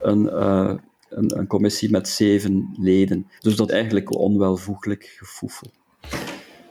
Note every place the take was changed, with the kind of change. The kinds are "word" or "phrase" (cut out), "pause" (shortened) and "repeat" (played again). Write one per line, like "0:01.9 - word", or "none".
0:01.4 - word
0:03.4 - pause
0:03.7 - word
0:04.1 - phrase